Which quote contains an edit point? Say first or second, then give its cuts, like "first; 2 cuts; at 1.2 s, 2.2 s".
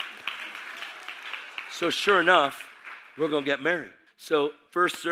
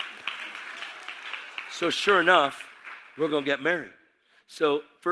first; 1 cut; at 4.1 s